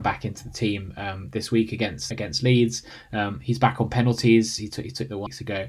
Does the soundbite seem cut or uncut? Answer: uncut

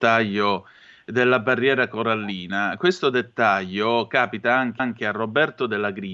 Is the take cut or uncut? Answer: cut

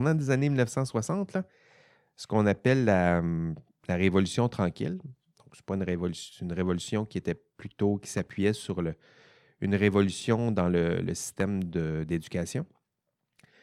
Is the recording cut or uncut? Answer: uncut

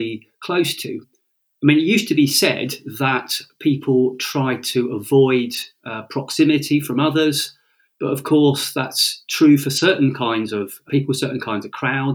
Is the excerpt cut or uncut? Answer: uncut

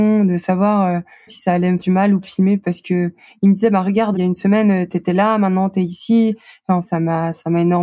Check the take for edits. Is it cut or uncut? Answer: cut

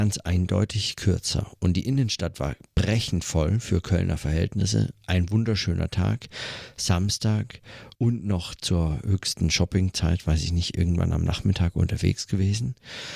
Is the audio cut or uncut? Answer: cut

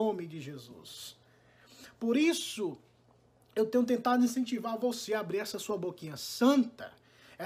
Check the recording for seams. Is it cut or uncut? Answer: uncut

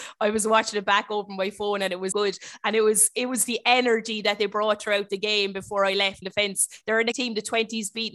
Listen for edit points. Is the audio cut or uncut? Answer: cut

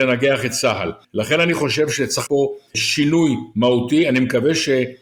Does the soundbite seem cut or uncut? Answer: cut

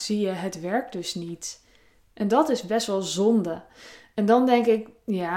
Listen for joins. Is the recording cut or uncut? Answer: uncut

